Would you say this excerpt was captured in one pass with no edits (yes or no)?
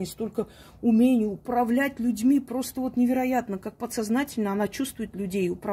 yes